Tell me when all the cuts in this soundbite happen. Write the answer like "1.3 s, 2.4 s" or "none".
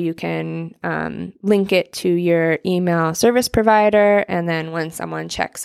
none